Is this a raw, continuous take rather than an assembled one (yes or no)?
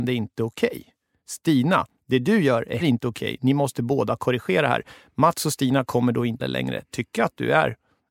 no